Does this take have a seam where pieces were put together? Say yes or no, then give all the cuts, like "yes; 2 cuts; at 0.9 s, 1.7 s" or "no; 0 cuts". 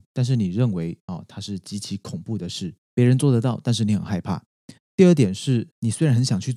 yes; 1 cut; at 2.8 s